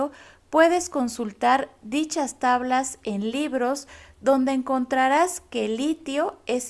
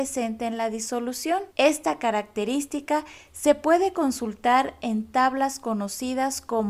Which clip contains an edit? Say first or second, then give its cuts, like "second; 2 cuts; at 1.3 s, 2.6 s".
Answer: second; 1 cut; at 1.5 s